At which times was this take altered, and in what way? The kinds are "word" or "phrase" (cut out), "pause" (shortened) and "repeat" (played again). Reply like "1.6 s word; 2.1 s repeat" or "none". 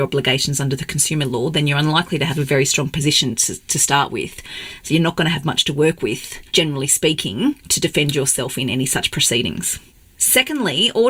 6.5 s pause